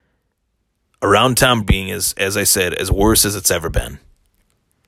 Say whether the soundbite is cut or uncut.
cut